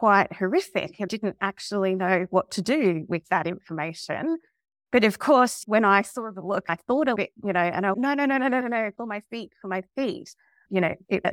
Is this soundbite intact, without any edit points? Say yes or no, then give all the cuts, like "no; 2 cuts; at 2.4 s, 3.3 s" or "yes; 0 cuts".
no; 4 cuts; at 1.1 s, 7.2 s, 7.9 s, 8.6 s